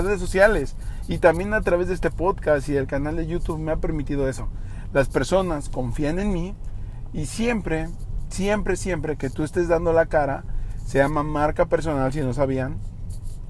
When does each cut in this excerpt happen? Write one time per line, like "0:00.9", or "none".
none